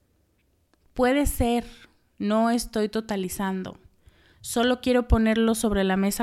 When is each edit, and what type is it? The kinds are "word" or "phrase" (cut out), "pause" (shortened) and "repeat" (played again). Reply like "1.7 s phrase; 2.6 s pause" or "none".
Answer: none